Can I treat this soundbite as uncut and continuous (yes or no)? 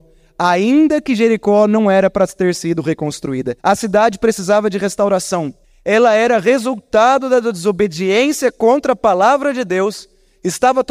no